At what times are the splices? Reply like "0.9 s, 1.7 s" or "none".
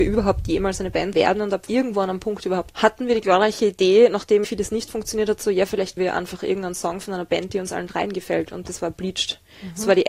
1.1 s, 1.7 s, 2.7 s, 4.4 s, 6.0 s